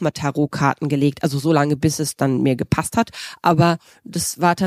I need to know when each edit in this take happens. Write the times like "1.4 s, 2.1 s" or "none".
none